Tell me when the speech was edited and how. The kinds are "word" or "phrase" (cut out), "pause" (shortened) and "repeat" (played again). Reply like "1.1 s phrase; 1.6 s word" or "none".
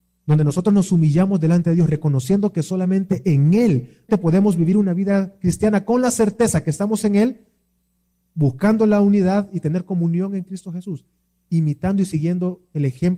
4.1 s word